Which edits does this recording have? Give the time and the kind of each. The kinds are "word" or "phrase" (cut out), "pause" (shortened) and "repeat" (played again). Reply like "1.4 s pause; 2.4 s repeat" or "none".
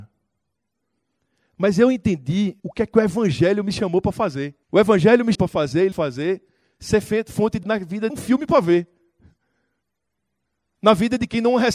2.6 s pause; 4.6 s pause; 5.3 s word; 5.9 s phrase; 7.6 s word; 8.1 s phrase